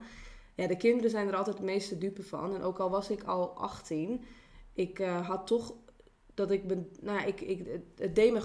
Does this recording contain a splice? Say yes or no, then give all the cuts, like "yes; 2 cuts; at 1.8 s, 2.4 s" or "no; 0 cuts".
no; 0 cuts